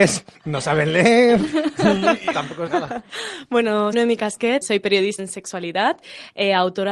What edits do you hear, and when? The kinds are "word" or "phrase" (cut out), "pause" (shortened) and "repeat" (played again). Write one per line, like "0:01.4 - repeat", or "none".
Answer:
0:02.3 - word
0:02.7 - word
0:03.9 - word
0:04.6 - word
0:05.2 - word